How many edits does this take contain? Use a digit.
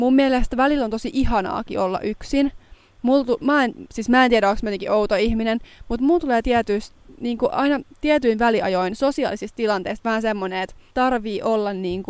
0